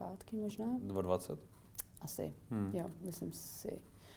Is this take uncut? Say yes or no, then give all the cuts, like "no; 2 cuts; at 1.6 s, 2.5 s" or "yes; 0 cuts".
yes; 0 cuts